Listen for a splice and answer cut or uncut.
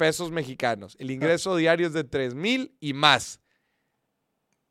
uncut